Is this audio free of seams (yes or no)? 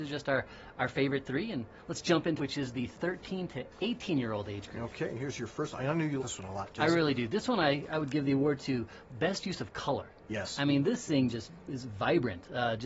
no